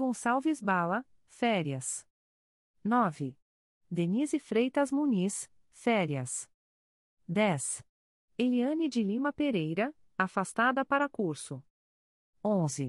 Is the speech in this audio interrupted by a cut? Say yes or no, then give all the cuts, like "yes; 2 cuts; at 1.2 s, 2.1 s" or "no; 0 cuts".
no; 0 cuts